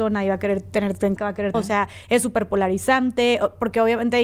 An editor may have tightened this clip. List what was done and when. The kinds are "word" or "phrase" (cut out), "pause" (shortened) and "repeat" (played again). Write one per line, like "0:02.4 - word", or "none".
0:01.2 - phrase
0:01.5 - phrase